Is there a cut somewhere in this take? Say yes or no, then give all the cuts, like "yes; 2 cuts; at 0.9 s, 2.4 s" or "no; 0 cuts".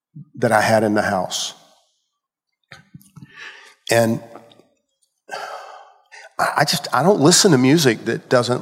no; 0 cuts